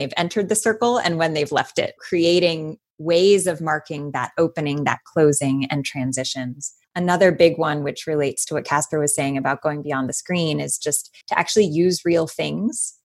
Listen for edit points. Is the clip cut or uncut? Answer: cut